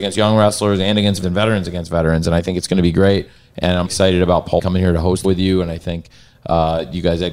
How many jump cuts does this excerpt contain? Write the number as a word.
four